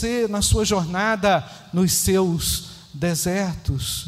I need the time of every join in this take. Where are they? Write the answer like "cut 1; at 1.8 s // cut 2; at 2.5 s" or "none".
none